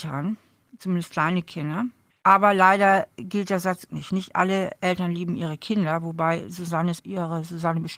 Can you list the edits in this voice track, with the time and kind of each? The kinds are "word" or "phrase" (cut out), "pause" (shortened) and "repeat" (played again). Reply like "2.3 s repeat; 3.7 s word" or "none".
2.1 s pause; 3.9 s word; 7.0 s word